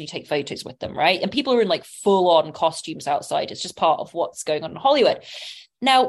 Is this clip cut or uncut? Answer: uncut